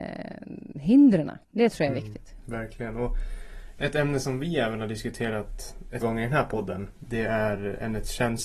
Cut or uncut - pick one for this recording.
cut